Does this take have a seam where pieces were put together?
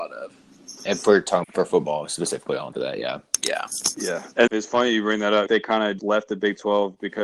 yes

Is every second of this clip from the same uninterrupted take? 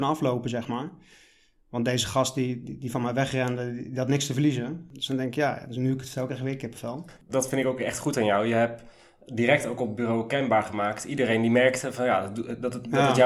yes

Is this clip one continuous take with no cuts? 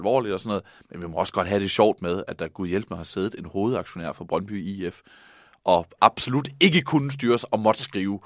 yes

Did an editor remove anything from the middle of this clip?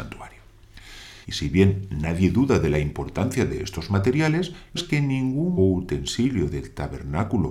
yes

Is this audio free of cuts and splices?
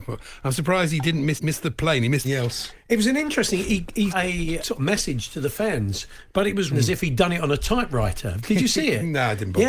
no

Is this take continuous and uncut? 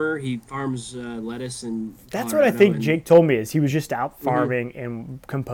yes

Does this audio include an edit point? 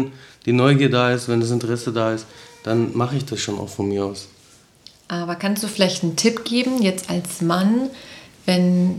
no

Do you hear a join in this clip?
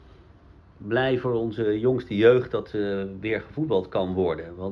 no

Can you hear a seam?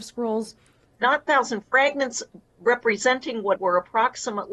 yes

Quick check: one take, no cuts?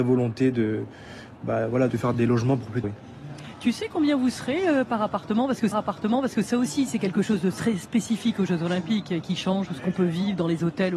no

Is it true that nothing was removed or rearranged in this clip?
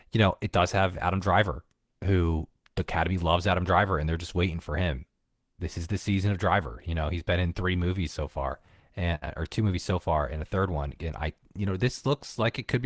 yes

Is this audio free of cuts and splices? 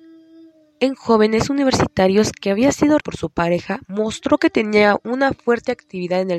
no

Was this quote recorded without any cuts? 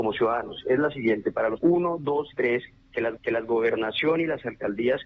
no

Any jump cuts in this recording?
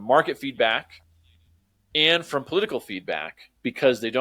no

